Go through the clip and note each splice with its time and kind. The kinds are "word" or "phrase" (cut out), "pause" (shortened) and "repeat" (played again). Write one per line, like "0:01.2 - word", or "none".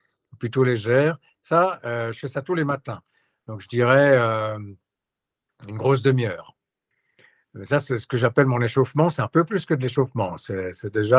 none